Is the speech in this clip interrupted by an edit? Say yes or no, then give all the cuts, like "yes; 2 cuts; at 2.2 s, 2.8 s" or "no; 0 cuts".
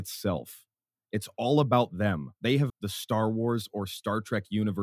yes; 2 cuts; at 2.4 s, 2.7 s